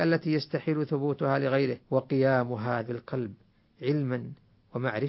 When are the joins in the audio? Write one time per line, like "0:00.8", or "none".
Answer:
0:01.8
0:02.9